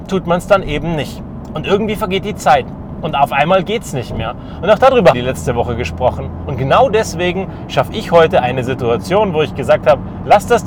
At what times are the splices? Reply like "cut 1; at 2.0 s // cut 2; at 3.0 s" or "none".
cut 1; at 5.1 s

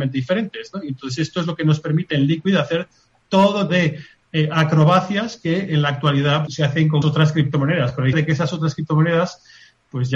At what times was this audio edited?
cut 1; at 3.7 s // cut 2; at 6.5 s // cut 3; at 7.0 s // cut 4; at 8.1 s

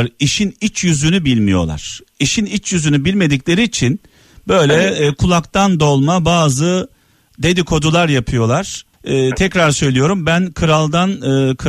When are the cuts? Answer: cut 1; at 8.9 s

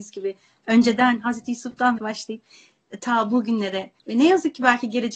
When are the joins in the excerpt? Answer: cut 1; at 2.0 s // cut 2; at 4.0 s

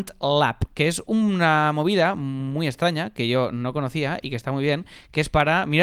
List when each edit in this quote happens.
none

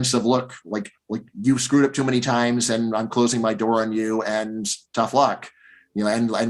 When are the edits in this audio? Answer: none

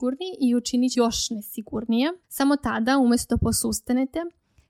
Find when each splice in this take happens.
cut 1; at 0.9 s // cut 2; at 2.2 s

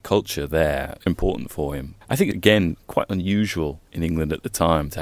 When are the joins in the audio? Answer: cut 1; at 1.1 s // cut 2; at 2.0 s // cut 3; at 2.3 s // cut 4; at 3.9 s

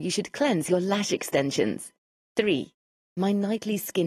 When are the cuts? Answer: cut 1; at 2.0 s

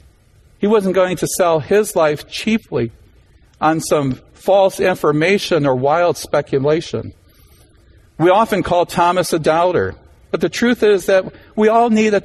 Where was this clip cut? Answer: none

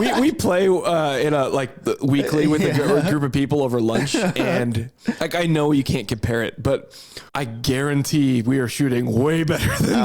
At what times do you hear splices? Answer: cut 1; at 7.3 s

